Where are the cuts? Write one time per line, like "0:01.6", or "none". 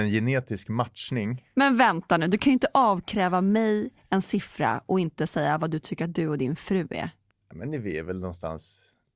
0:07.3

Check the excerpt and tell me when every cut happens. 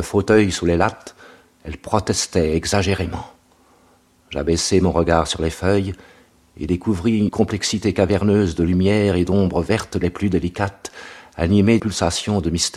0:07.3
0:11.8

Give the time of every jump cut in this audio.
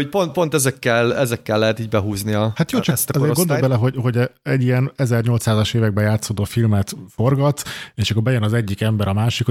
none

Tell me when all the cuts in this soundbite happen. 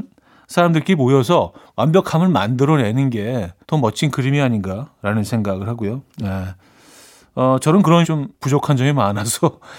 0:03.6
0:06.1
0:08.0
0:08.3

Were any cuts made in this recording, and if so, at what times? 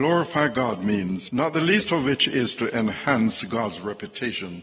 0:01.3

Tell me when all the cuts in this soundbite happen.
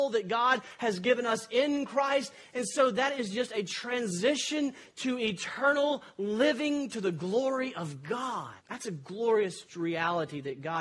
0:08.6

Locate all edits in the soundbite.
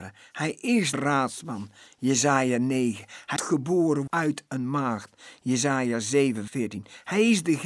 0:00.9
0:03.4
0:04.1
0:06.5

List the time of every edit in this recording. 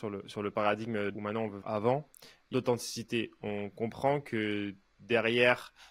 0:01.1
0:01.6
0:02.5

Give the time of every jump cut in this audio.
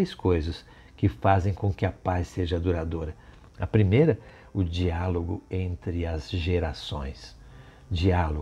none

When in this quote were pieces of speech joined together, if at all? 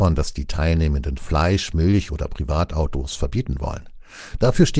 0:01.2

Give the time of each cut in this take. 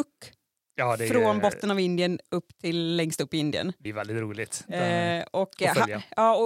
0:03.9

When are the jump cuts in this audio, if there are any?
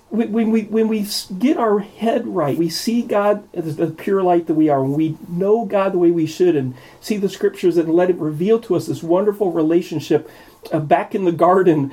0:02.6

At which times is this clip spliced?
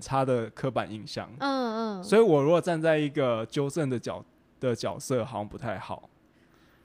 none

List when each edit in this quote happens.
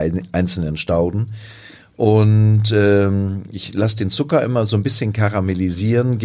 none

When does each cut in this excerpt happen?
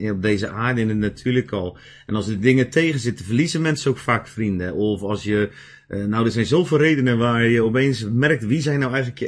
none

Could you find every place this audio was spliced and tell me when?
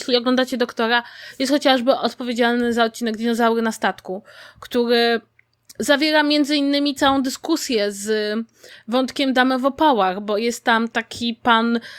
none

